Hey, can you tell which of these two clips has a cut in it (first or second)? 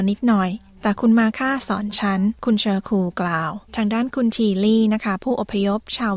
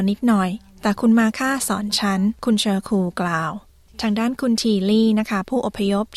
first